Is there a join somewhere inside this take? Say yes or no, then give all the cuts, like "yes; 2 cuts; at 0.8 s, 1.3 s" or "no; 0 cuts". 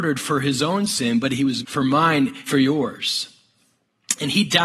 yes; 2 cuts; at 1.6 s, 2.5 s